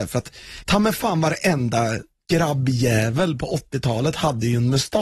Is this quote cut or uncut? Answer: uncut